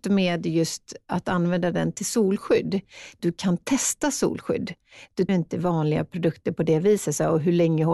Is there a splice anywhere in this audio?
yes; 2 cuts; at 3.2 s, 5.3 s

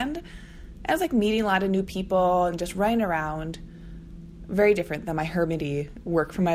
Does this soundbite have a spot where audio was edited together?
no; 0 cuts

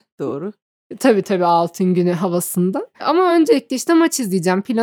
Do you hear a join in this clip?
no; 0 cuts

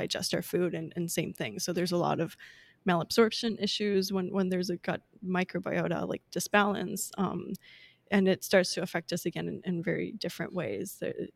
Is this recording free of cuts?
yes; 0 cuts

